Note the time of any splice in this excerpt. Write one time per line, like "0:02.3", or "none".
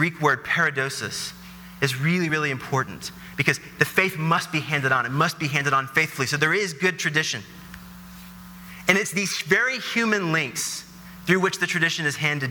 none